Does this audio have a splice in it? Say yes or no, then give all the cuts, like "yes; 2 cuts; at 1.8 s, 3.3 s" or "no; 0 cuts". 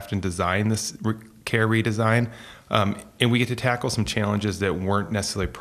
no; 0 cuts